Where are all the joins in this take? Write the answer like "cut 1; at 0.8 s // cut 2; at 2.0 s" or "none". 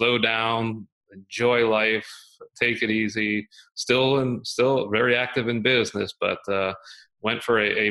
none